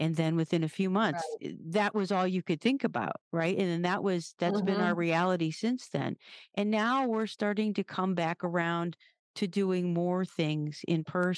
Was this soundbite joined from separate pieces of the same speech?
no; 0 cuts

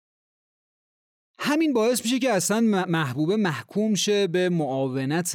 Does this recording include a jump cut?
no; 0 cuts

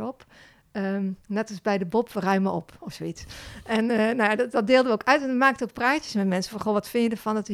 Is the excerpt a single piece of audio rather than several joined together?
yes; 0 cuts

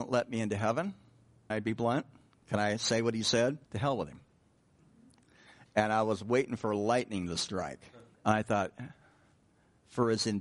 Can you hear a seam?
yes; 3 cuts; at 1.5 s, 3.6 s, 8.1 s

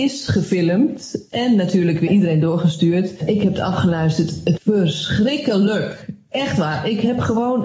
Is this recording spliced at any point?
yes; 2 cuts; at 2.1 s, 4.6 s

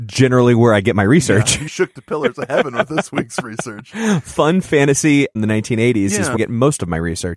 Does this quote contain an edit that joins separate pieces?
yes; 3 cuts; at 1.7 s, 5.4 s, 6.4 s

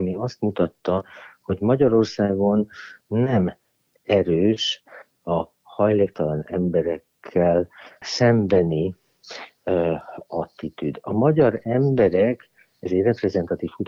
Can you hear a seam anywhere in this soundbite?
yes; 2 cuts; at 3.0 s, 8.0 s

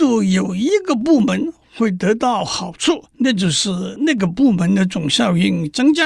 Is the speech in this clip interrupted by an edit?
yes; 1 cut; at 3.1 s

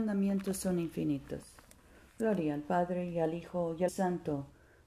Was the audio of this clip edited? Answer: yes; 1 cut; at 3.9 s

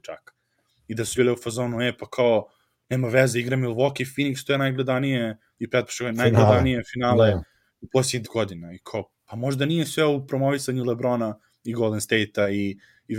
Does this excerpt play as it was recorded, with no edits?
no; 2 cuts; at 1.2 s, 8.2 s

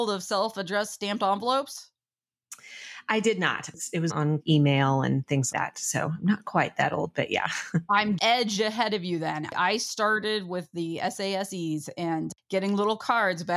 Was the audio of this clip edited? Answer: yes; 4 cuts; at 4.1 s, 4.4 s, 5.5 s, 8.2 s

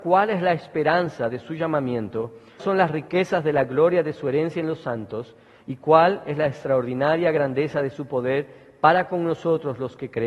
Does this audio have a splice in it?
yes; 1 cut; at 2.6 s

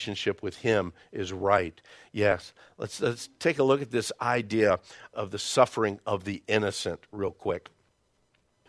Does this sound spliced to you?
no; 0 cuts

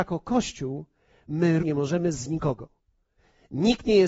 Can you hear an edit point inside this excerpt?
yes; 2 cuts; at 1.6 s, 2.1 s

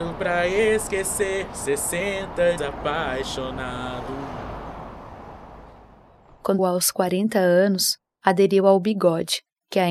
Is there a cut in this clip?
yes; 2 cuts; at 2.6 s, 6.6 s

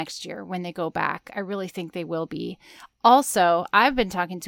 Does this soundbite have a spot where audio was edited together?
no; 0 cuts

